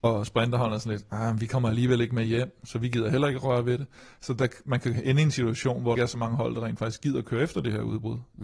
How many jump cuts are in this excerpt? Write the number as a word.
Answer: one